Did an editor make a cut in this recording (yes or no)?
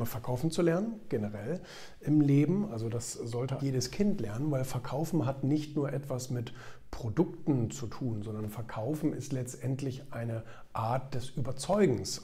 yes